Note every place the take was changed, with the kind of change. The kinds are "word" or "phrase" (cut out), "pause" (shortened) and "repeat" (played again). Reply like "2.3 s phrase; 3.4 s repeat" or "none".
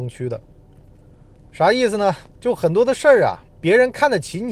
2.3 s pause; 3.5 s pause